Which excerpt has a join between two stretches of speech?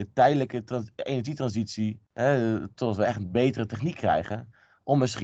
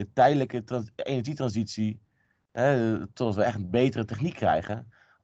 first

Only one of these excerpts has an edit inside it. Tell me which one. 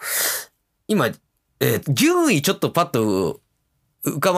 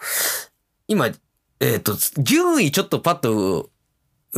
first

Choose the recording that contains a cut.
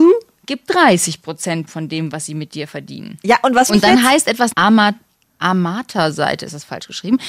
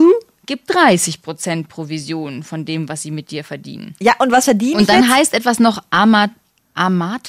first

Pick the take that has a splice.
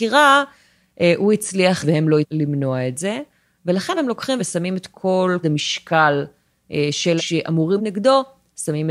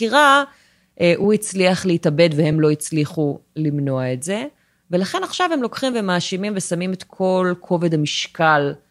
first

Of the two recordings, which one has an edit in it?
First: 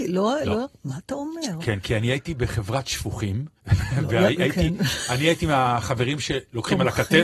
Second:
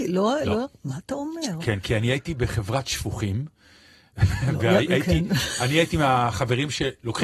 first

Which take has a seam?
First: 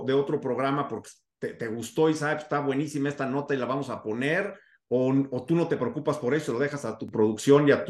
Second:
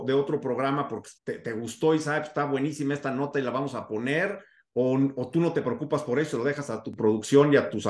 second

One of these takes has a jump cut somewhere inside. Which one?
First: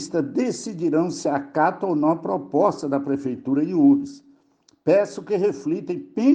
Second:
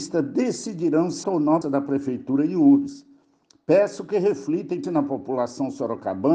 second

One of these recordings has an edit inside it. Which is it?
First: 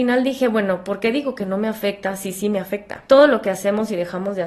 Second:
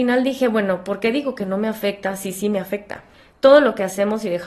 first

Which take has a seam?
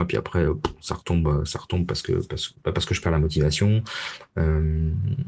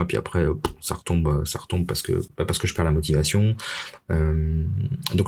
second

